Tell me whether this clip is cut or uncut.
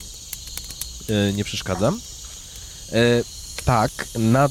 uncut